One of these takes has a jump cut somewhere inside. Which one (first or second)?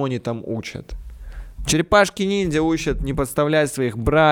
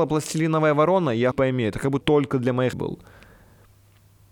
second